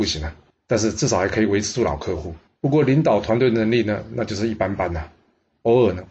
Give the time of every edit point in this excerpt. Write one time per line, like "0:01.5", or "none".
0:02.5